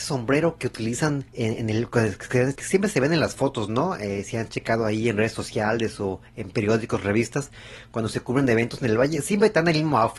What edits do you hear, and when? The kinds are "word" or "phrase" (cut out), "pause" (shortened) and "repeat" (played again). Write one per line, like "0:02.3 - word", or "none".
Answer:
0:01.3 - pause
0:02.6 - word